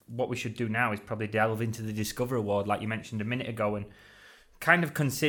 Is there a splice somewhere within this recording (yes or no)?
no